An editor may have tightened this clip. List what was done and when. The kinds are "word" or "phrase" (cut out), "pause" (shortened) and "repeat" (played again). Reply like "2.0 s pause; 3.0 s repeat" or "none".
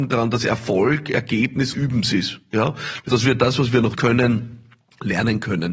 1.7 s word; 3.1 s word; 3.9 s word